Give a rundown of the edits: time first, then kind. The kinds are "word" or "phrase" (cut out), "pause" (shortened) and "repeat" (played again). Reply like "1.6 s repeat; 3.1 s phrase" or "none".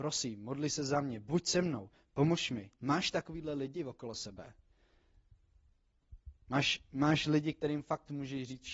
2.7 s pause; 6.4 s pause

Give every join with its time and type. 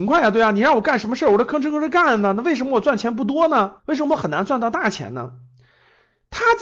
3.8 s pause

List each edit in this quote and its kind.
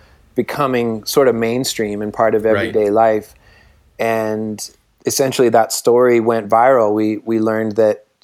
none

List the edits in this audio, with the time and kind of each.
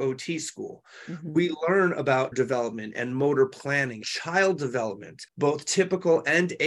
2.3 s word; 4.0 s word; 5.3 s pause

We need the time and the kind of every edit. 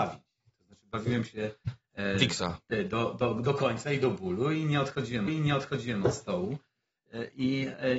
5.3 s repeat

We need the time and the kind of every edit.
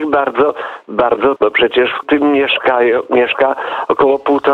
1.4 s word; 2.0 s word

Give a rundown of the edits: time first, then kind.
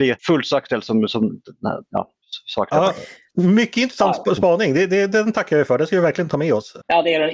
2.2 s pause

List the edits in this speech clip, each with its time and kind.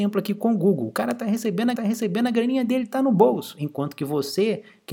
1.7 s repeat

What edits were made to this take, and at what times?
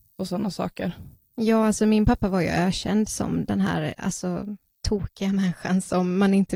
none

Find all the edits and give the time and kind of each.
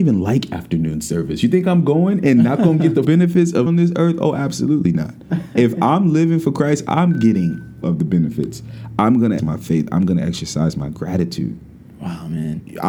3.0 s word; 3.7 s word; 7.8 s word; 9.4 s word

